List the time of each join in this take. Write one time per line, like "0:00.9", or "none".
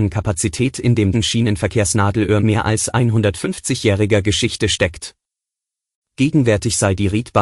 0:01.1
0:02.4